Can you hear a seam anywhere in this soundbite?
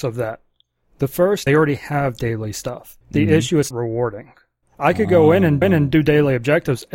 yes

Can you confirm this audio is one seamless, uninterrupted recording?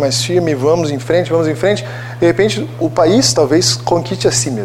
yes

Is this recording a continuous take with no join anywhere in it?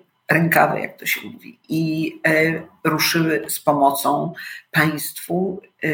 yes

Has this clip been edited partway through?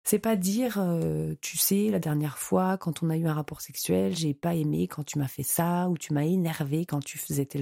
no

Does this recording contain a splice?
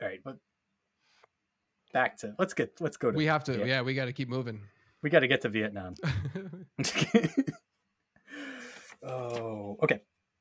no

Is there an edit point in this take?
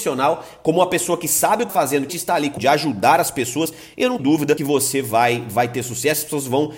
yes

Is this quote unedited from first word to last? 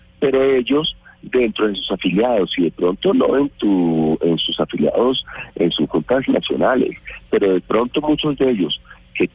yes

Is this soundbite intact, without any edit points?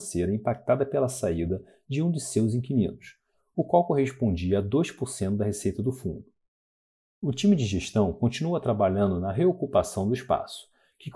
yes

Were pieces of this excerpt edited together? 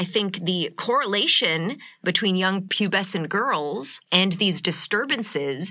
no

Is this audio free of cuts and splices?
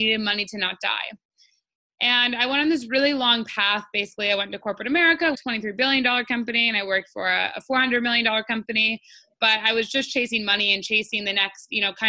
no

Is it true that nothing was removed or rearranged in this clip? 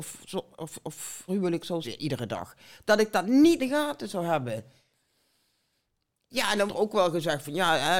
no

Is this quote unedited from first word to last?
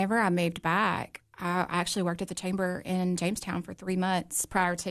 yes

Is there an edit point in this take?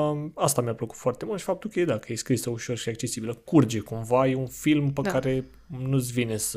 no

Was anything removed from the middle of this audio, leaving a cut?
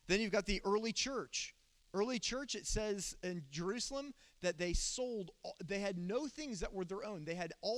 no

